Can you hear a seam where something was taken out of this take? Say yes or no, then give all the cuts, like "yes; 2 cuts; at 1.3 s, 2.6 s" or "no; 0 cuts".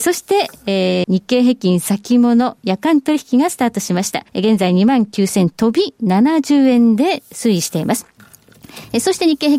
yes; 2 cuts; at 1.0 s, 4.3 s